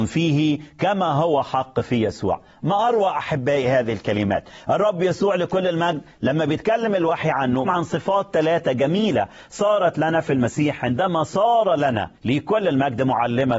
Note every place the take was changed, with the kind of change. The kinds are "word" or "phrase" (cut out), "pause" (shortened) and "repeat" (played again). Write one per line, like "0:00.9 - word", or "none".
0:07.6 - word
0:12.1 - pause